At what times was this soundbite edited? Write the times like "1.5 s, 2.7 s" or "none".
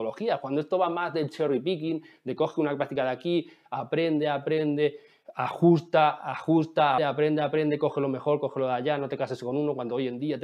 7.0 s